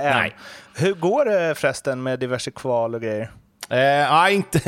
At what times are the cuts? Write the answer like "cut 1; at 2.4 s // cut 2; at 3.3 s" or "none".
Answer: none